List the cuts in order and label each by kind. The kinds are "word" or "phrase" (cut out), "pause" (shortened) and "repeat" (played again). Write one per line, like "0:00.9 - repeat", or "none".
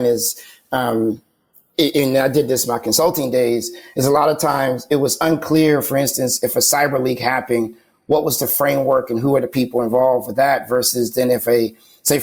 none